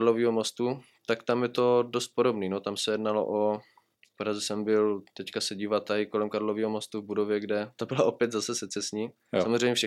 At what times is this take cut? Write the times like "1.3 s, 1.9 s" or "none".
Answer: 3.9 s, 5.1 s